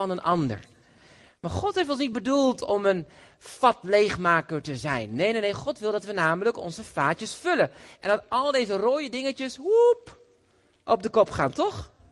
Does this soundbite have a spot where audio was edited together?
no; 0 cuts

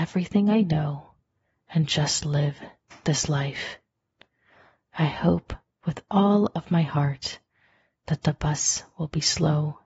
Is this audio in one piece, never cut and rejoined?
yes; 0 cuts

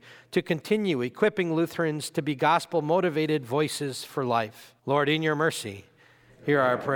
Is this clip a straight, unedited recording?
no; 1 cut; at 4.8 s

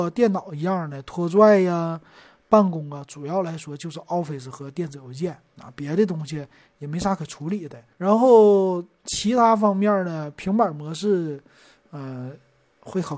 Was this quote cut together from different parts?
yes; 1 cut; at 7.9 s

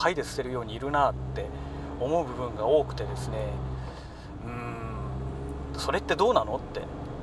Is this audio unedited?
yes; 0 cuts

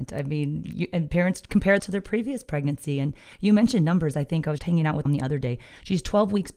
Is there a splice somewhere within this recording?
yes; 3 cuts; at 1.8 s, 4.6 s, 5.1 s

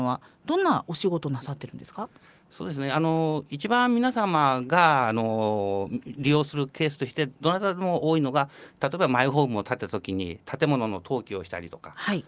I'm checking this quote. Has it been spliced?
no; 0 cuts

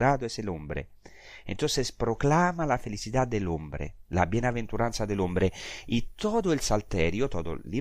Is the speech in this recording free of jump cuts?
yes; 0 cuts

